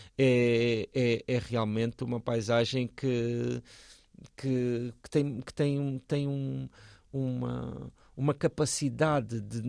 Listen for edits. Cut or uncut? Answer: cut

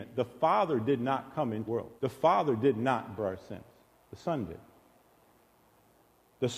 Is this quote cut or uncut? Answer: cut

